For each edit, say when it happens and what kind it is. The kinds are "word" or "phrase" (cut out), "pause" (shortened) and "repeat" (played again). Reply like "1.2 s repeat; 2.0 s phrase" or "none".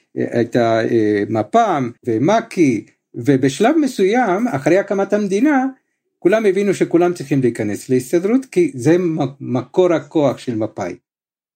2.0 s pause